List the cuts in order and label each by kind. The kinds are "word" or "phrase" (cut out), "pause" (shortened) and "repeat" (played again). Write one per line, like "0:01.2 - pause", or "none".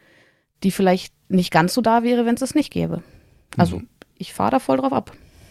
none